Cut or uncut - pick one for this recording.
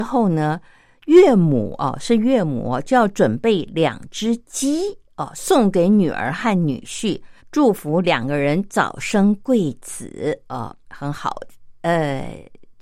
cut